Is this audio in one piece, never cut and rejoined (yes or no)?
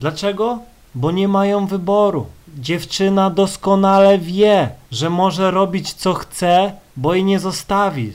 no